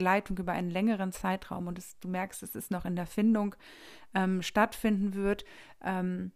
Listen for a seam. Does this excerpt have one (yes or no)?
no